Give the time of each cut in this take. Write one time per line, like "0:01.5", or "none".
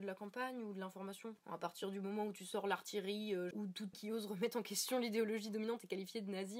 0:01.4
0:03.5
0:03.9